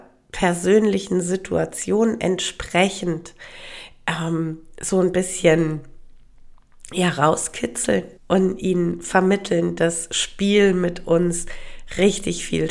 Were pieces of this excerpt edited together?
yes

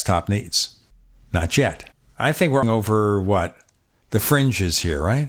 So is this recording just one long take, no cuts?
no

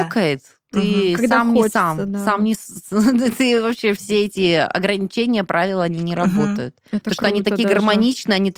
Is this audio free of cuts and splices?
yes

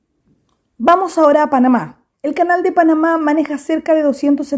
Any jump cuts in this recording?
yes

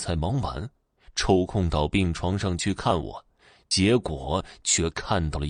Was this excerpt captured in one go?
yes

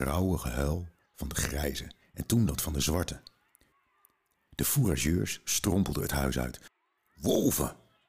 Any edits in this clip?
no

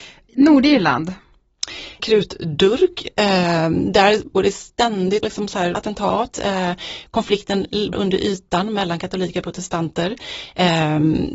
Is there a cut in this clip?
yes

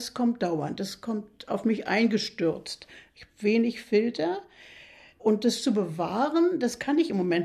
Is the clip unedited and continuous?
yes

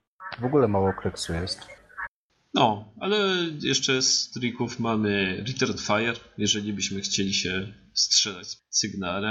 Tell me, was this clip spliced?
no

